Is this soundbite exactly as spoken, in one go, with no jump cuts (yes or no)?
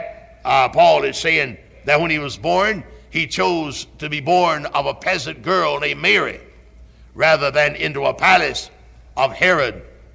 yes